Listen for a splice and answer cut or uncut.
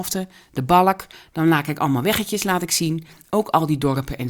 uncut